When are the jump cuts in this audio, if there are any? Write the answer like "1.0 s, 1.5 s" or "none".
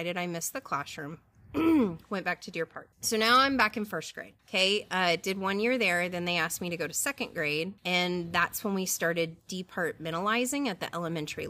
2.9 s, 4.4 s, 7.8 s